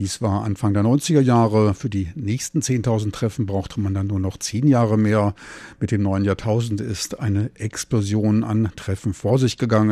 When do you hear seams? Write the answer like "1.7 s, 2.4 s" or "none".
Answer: none